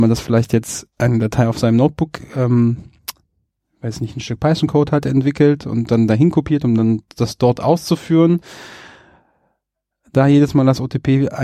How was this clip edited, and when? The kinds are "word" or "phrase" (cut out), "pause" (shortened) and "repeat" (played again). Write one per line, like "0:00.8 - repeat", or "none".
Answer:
0:00.9 - pause